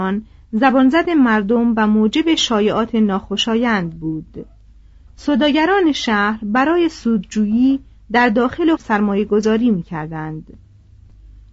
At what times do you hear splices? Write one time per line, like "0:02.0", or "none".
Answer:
0:08.8